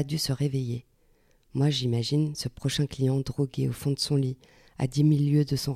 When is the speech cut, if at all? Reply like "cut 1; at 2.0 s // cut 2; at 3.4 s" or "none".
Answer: none